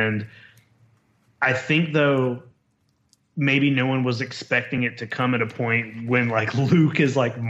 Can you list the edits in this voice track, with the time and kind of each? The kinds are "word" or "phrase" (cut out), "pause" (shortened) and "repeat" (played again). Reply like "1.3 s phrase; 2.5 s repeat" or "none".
none